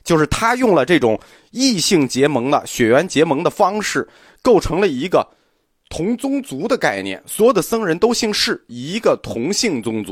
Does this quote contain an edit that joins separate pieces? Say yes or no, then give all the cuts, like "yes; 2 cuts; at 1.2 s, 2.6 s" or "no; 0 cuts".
no; 0 cuts